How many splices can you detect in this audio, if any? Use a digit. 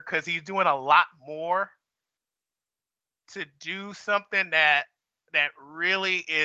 0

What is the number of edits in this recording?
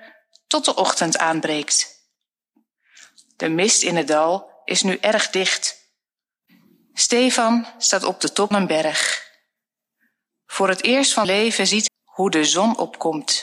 3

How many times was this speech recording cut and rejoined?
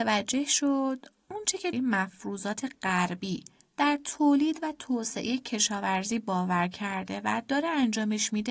1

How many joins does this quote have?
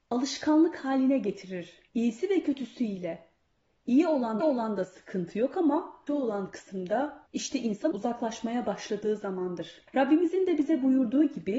6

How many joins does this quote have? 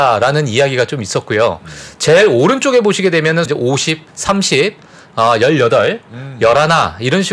2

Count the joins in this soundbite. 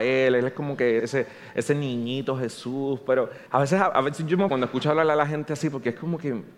3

